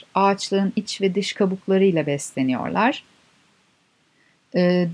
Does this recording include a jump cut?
no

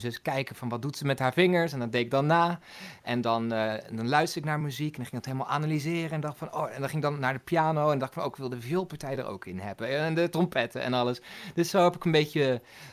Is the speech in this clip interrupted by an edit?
no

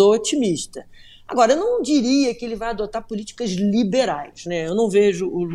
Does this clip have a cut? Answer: no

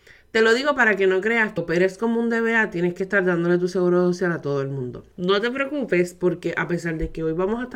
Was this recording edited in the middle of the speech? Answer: yes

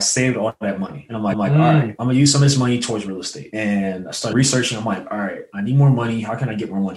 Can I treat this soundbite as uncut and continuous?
no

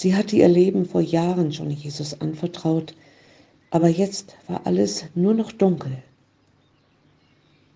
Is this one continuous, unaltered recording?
yes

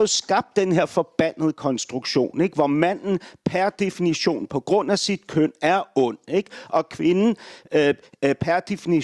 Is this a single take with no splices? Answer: yes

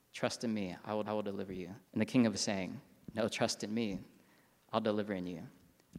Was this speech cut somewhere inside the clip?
yes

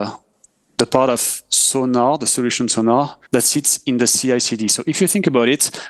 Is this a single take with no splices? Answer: no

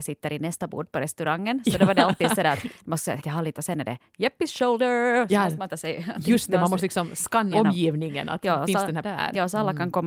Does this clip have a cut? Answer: yes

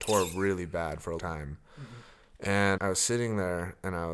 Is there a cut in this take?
yes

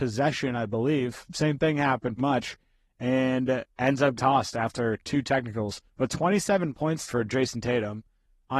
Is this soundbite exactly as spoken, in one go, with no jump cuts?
no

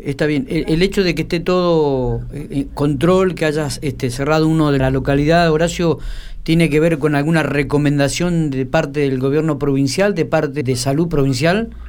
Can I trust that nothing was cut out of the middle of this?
no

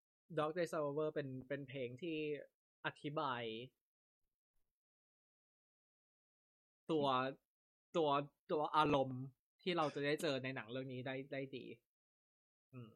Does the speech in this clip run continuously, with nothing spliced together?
yes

